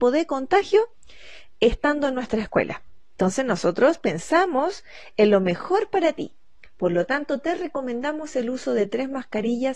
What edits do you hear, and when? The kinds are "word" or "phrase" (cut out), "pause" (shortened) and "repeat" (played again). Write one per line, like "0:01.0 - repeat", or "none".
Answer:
none

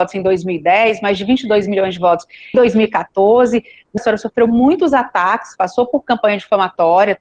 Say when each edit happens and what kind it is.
0:02.5 - word
0:04.0 - phrase

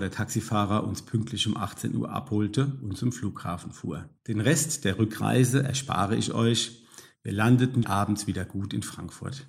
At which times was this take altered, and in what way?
0:04.2 - pause
0:07.8 - word

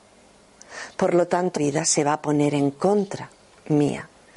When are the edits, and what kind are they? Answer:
0:01.6 - word

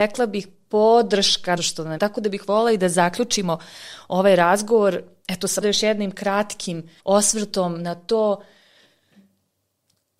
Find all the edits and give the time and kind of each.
0:01.6 - word
0:02.0 - phrase
0:05.6 - word
0:07.0 - pause

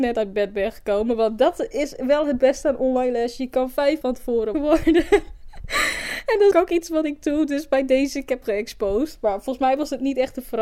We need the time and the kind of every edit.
0:04.0 - word
0:04.5 - word
0:06.5 - phrase
0:08.4 - word

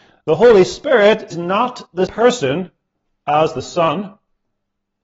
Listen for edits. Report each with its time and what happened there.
0:01.3 - word
0:02.1 - word

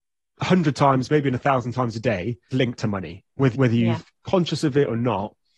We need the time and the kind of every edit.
0:02.5 - word
0:03.5 - word

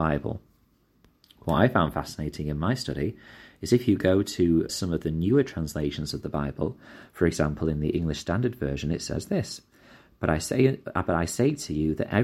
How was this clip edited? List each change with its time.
0:04.7 - word

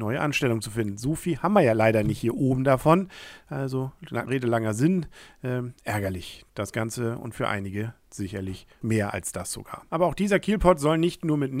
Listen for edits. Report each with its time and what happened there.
0:04.3 - word
0:08.8 - word

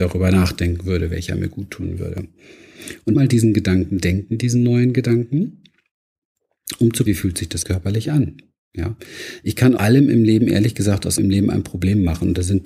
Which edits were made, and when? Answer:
0:03.1 - word
0:07.1 - word
0:07.6 - word
0:09.8 - word
0:11.2 - word

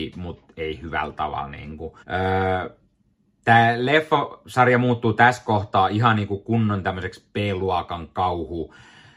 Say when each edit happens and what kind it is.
0:02.0 - pause

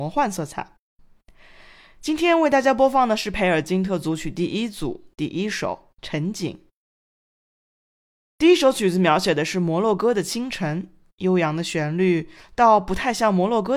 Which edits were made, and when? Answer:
none

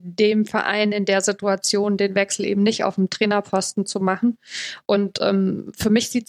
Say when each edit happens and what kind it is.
none

